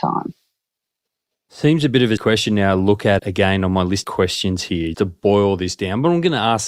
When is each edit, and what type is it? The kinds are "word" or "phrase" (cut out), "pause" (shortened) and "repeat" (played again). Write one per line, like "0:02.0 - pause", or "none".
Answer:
0:02.2 - word
0:03.2 - word
0:04.0 - word
0:04.9 - word